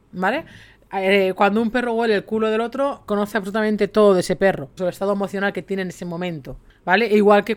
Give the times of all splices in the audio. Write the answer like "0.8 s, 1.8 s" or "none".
4.8 s

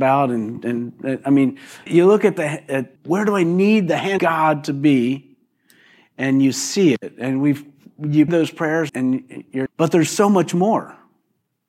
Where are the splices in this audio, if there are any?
1.9 s, 3.0 s, 4.2 s, 8.3 s, 8.9 s, 9.7 s

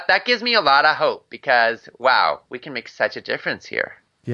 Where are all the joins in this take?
none

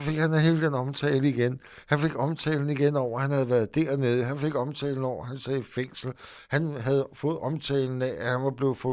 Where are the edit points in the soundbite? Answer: none

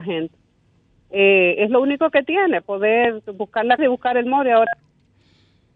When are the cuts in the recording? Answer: 2.6 s, 3.8 s

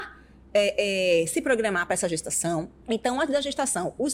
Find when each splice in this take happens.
2.8 s

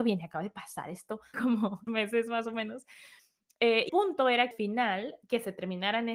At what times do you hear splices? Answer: 1.3 s, 1.9 s, 3.9 s, 4.5 s

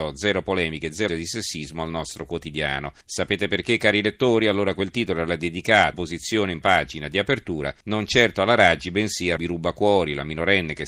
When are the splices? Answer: 1.1 s, 3.0 s, 5.9 s, 6.6 s, 7.8 s, 9.4 s

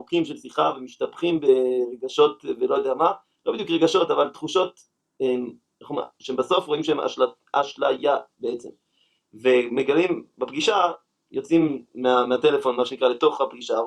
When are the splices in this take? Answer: none

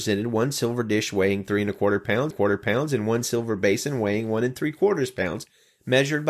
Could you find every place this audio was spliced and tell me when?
2.3 s

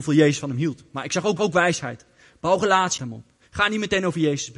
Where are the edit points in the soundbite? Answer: 1.4 s, 3.0 s

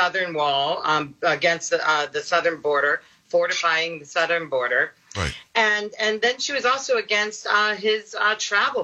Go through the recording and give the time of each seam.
none

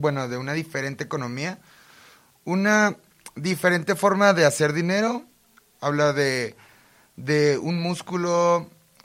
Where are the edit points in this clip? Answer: none

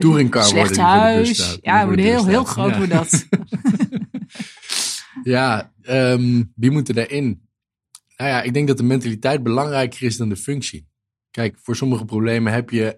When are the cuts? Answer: none

